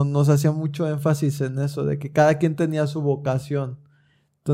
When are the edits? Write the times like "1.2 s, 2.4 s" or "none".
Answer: none